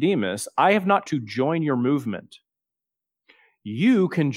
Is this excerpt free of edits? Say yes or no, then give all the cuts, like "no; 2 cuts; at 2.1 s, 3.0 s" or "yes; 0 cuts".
no; 1 cut; at 1.1 s